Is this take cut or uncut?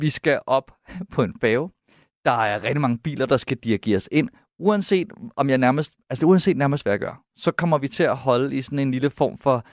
uncut